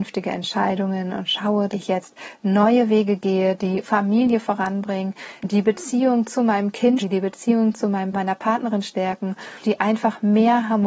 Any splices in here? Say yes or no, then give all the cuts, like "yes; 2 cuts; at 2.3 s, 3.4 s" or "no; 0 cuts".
yes; 6 cuts; at 1.7 s, 3.8 s, 5.4 s, 7.0 s, 8.1 s, 9.6 s